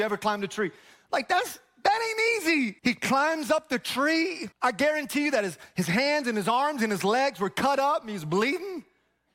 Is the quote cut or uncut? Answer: cut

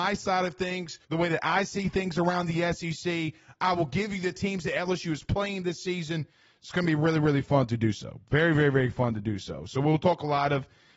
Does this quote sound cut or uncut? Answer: cut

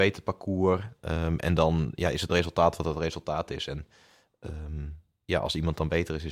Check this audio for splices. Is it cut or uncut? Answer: uncut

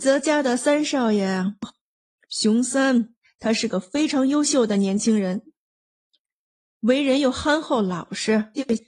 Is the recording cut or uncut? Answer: uncut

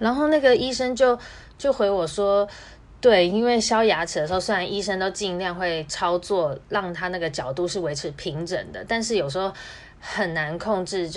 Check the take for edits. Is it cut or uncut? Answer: uncut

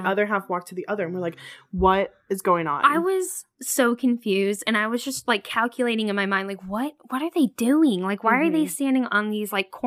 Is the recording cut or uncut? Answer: uncut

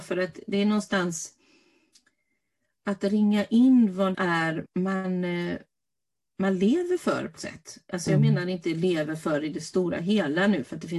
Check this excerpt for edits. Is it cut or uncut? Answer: cut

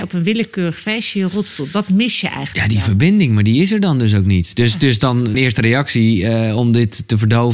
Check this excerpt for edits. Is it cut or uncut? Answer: cut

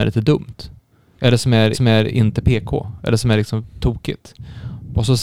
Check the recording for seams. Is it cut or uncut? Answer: cut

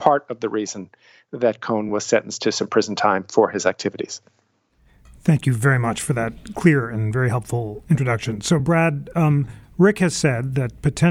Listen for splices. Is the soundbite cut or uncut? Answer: uncut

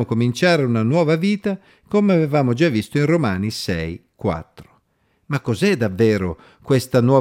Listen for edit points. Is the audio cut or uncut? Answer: uncut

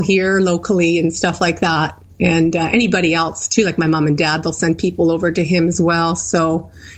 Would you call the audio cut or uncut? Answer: uncut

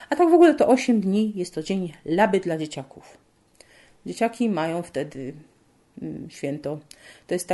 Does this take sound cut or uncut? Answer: uncut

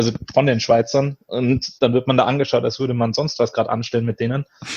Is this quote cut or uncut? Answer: cut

